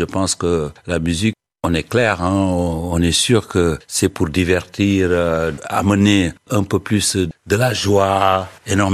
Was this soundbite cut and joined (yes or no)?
no